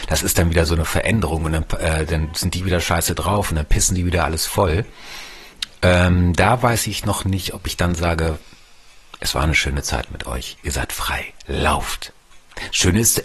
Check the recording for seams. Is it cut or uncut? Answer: uncut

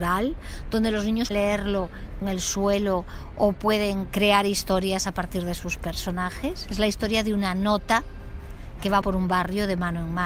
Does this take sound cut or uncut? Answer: cut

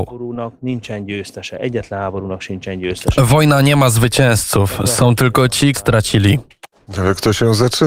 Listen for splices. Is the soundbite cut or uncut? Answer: cut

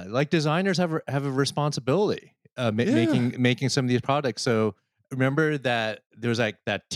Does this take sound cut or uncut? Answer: uncut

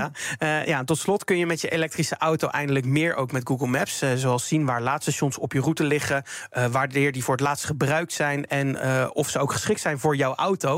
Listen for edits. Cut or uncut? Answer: uncut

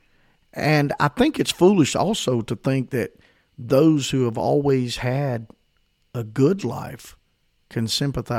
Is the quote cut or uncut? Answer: uncut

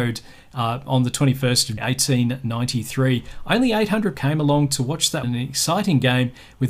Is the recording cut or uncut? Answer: cut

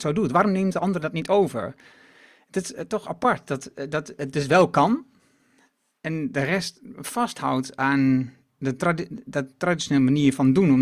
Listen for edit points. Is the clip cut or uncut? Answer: uncut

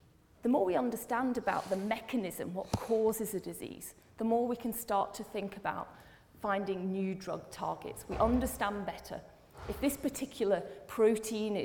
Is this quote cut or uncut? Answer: uncut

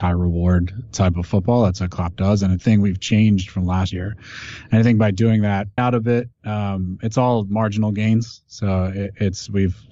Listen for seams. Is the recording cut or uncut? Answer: cut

